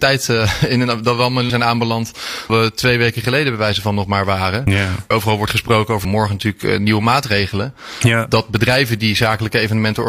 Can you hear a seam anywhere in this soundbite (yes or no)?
yes